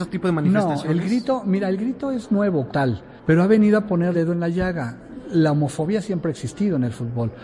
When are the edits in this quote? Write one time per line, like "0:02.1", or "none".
0:02.7
0:04.1